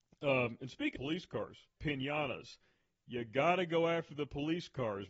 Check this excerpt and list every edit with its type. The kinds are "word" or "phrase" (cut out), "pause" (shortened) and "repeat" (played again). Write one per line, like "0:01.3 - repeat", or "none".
0:00.9 - word
0:01.8 - word